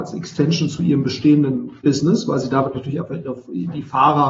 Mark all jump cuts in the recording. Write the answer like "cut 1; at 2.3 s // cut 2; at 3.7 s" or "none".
cut 1; at 1.8 s